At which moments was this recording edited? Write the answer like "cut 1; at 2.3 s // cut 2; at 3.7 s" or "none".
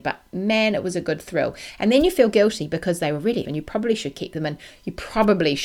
cut 1; at 3.4 s